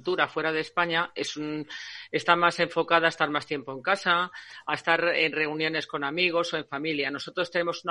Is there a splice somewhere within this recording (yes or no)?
no